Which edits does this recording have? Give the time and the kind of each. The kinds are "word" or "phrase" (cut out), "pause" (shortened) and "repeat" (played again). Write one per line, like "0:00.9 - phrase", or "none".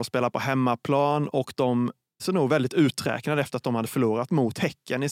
0:02.2 - word